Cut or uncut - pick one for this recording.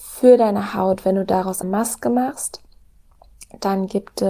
cut